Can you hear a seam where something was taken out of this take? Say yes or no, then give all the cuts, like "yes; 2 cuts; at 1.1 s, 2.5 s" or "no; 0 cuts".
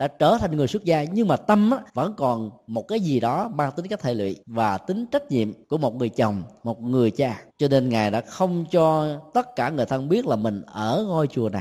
yes; 4 cuts; at 1.9 s, 4.4 s, 5.6 s, 7.5 s